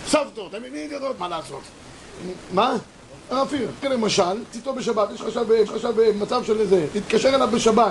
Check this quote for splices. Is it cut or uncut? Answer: cut